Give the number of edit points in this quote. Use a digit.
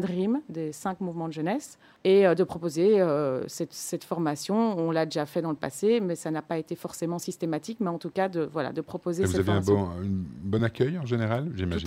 0